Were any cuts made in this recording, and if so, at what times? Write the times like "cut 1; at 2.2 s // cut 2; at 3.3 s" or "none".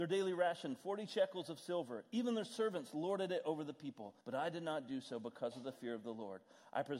cut 1; at 4.2 s